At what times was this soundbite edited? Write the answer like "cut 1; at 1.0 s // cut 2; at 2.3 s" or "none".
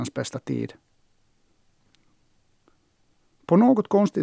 none